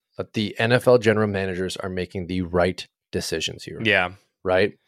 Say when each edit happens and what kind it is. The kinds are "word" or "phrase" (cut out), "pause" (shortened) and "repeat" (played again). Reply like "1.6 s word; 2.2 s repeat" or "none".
none